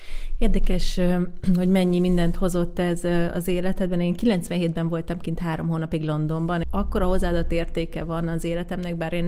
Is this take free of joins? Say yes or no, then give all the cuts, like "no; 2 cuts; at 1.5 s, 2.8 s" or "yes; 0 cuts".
no; 1 cut; at 6.6 s